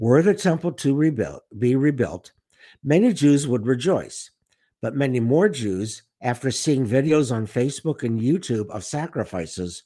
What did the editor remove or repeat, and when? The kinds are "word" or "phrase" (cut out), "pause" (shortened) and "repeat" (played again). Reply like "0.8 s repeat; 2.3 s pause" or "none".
none